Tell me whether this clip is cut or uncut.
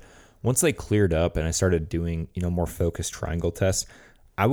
uncut